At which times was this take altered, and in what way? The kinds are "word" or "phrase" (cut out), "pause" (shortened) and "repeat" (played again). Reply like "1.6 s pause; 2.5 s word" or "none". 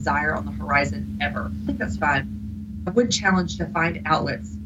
1.7 s word; 2.0 s word; 2.9 s word; 3.6 s word